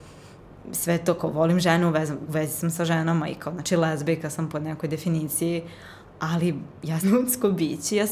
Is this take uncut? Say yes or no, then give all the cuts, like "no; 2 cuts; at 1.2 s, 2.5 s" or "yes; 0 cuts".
no; 1 cut; at 7.0 s